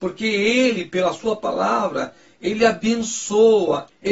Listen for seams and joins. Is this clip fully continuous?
yes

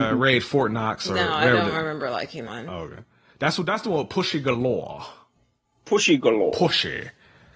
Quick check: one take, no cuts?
no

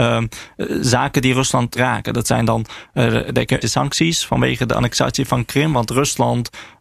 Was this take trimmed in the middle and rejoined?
yes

